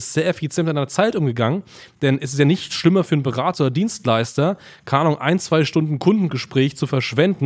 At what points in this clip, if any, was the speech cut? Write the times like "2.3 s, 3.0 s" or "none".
none